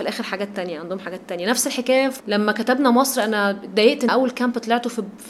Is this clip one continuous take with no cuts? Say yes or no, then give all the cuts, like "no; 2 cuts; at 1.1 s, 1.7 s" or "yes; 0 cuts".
no; 2 cuts; at 2.2 s, 4.1 s